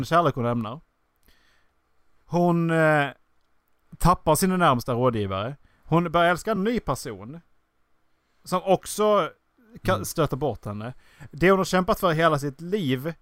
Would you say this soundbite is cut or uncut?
uncut